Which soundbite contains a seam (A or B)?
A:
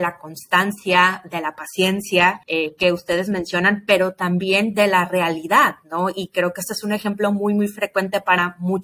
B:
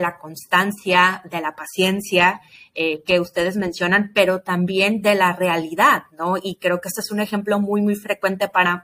A